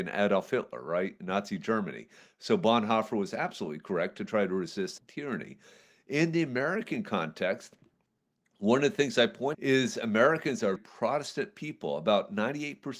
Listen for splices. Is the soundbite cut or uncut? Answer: cut